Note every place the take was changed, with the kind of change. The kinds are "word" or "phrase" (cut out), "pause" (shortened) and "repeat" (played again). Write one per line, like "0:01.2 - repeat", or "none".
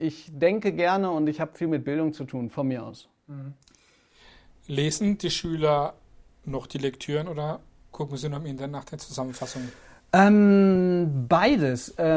none